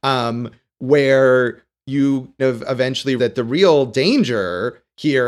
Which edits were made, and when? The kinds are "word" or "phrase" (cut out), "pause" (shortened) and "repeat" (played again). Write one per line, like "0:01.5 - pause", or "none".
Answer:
0:02.4 - word
0:03.2 - word

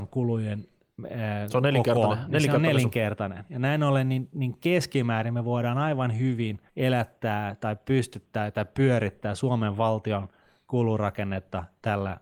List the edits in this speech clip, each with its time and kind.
0:06.7 - pause

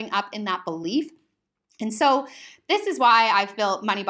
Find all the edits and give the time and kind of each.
none

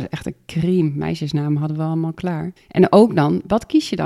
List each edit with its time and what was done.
0:02.6 - pause

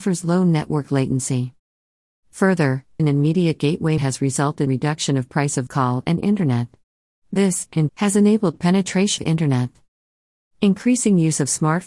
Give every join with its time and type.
0:03.0 - word
0:04.0 - word
0:04.7 - word
0:05.7 - word
0:07.9 - word
0:09.2 - word

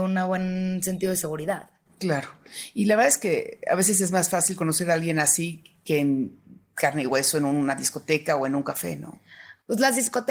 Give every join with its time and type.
none

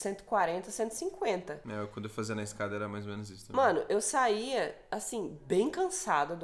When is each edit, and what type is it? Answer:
none

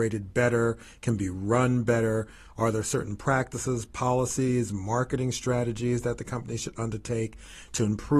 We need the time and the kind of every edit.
none

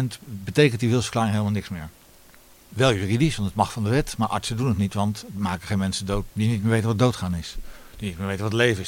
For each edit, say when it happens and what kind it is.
0:06.3 - word

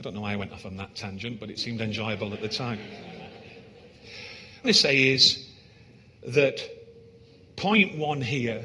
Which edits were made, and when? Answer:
0:04.6 - phrase
0:06.2 - pause

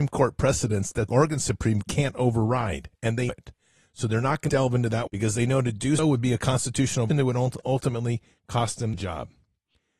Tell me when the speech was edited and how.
0:01.1 - word
0:01.8 - word
0:03.3 - word
0:04.5 - word
0:05.1 - word
0:06.0 - word
0:07.1 - word
0:08.9 - word

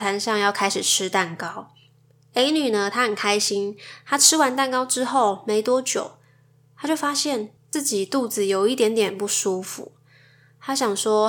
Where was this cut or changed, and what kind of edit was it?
0:07.6 - word

